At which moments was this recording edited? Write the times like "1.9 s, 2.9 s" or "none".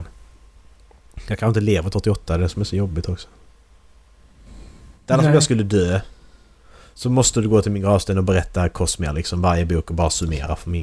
1.9 s